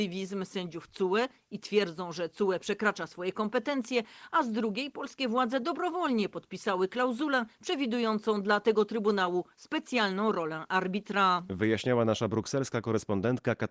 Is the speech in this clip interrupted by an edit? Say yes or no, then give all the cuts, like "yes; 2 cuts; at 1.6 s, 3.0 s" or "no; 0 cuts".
no; 0 cuts